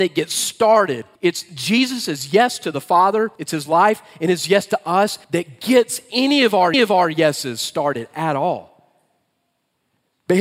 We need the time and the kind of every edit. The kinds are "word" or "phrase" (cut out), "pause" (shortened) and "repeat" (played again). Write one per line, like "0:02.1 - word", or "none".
0:01.1 - pause
0:03.4 - pause
0:05.2 - pause
0:06.7 - repeat